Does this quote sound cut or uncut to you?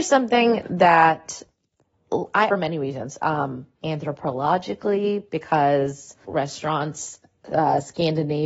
cut